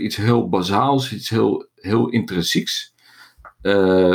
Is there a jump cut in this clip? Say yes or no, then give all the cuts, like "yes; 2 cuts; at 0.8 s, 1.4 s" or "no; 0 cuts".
no; 0 cuts